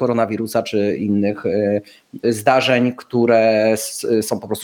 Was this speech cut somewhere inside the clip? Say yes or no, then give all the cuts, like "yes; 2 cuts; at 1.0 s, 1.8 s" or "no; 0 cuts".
yes; 1 cut; at 2.2 s